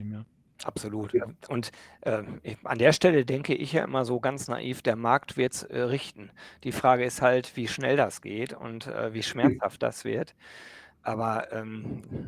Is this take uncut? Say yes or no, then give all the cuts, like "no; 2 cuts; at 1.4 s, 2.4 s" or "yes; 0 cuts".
yes; 0 cuts